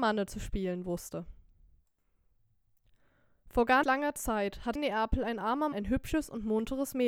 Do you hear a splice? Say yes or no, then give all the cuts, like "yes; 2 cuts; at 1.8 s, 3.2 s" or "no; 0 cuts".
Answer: yes; 3 cuts; at 3.8 s, 4.8 s, 5.7 s